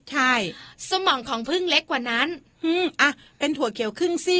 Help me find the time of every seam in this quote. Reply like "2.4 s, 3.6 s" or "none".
none